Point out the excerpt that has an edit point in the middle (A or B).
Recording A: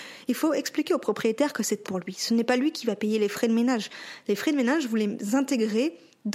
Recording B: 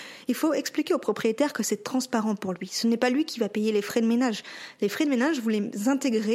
A